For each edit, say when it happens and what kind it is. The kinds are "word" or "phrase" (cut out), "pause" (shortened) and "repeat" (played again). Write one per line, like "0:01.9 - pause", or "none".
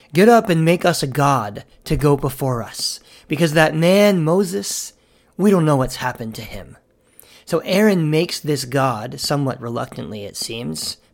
none